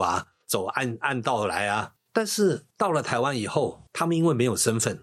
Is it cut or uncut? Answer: uncut